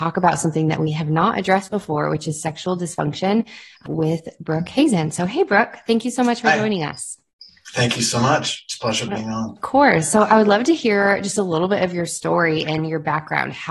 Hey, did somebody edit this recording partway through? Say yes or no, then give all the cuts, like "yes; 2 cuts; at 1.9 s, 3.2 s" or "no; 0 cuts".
no; 0 cuts